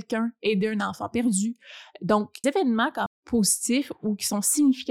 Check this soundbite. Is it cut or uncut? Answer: cut